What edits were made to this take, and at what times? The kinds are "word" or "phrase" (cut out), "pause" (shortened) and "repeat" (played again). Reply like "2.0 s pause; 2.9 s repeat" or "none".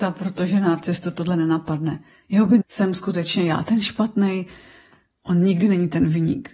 2.6 s word